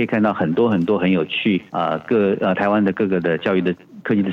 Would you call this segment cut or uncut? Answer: cut